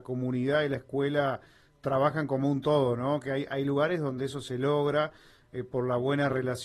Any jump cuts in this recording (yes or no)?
no